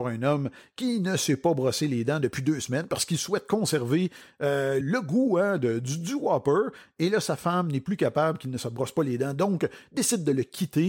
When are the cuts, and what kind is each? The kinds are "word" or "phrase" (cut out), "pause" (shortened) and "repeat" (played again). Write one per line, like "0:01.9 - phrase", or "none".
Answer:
0:04.8 - word